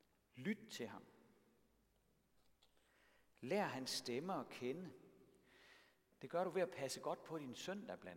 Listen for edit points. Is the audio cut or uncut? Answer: uncut